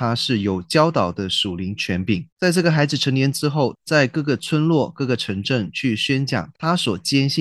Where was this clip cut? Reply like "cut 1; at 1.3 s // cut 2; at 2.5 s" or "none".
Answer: cut 1; at 2.3 s // cut 2; at 3.7 s